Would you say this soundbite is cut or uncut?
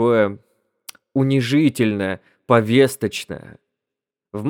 uncut